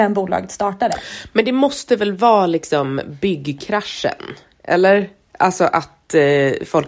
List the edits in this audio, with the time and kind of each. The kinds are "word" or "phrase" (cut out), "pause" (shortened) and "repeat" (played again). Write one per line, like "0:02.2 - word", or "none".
none